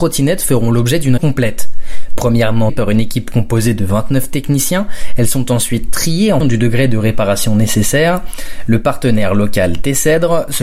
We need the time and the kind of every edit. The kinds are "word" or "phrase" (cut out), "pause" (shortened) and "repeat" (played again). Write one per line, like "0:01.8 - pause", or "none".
0:01.2 - word
0:02.7 - word
0:06.4 - word